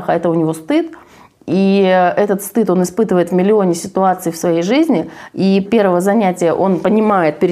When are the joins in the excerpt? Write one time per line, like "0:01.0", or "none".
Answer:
0:05.7